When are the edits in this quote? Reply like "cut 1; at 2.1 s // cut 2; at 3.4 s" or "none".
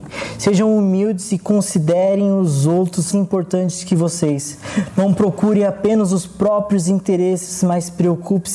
cut 1; at 3.1 s